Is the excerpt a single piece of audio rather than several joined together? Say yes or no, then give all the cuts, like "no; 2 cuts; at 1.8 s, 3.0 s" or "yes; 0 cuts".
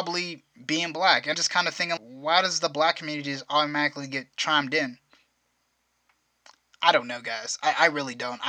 no; 2 cuts; at 1.3 s, 2.0 s